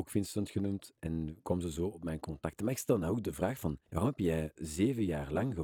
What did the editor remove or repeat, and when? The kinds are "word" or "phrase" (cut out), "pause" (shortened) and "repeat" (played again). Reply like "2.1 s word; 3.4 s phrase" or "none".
3.9 s pause